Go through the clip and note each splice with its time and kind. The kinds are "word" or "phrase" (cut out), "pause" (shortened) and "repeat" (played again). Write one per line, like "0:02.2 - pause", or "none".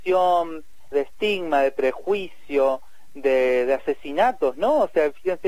0:00.9 - word